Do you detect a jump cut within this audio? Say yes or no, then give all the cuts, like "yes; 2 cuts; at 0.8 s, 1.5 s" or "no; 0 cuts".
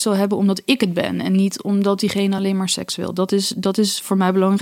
no; 0 cuts